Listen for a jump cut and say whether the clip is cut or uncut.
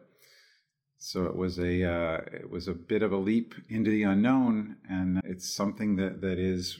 cut